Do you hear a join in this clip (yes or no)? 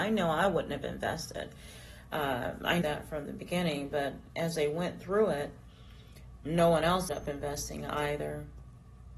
yes